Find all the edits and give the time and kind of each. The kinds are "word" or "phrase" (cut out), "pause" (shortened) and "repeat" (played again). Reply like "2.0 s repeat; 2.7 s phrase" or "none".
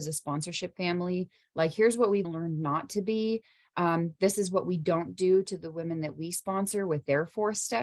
2.2 s word